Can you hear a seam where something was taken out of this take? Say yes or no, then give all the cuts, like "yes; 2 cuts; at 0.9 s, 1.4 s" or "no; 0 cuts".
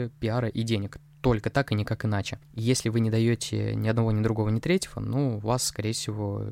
no; 0 cuts